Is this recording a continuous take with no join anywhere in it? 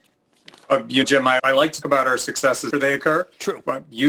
no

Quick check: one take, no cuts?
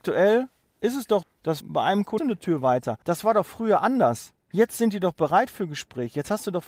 no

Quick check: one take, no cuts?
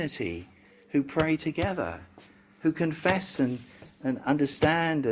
yes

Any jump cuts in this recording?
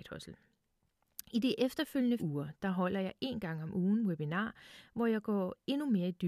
yes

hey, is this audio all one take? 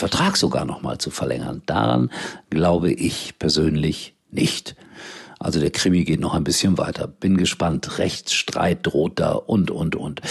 yes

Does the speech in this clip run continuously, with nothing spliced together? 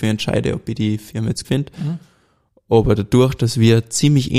no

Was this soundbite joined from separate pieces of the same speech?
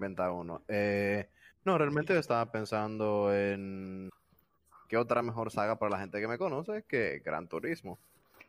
no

